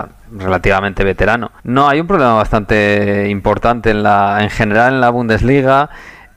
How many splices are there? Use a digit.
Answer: 1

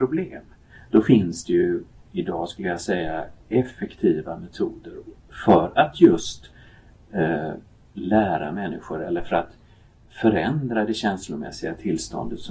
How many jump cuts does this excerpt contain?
0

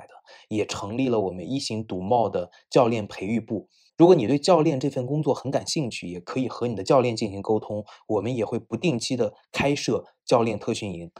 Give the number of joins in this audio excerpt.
1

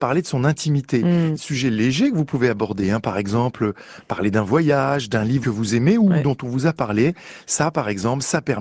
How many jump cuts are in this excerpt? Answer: 2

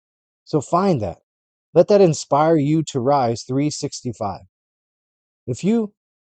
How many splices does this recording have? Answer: 0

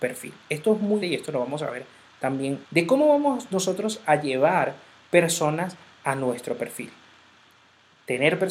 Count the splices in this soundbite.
2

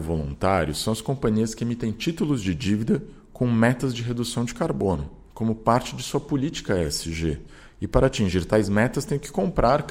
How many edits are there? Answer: 0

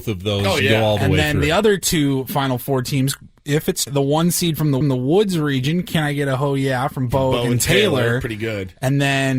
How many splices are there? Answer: 2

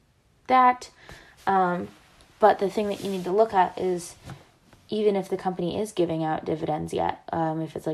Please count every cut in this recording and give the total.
0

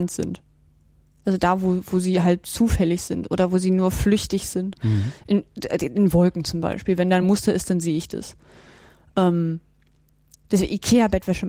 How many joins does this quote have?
0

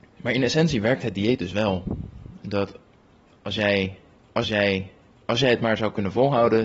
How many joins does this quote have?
1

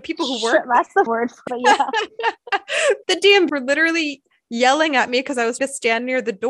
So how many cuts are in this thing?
5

